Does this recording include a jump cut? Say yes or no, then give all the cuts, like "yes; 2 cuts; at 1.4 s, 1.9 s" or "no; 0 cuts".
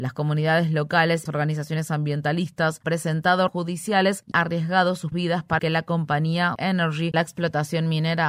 yes; 8 cuts; at 1.3 s, 2.8 s, 3.5 s, 4.3 s, 5.1 s, 5.6 s, 6.6 s, 7.1 s